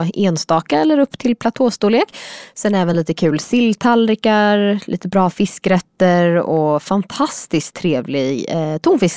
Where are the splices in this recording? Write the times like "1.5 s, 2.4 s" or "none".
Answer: none